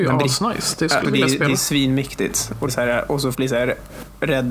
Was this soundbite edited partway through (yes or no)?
yes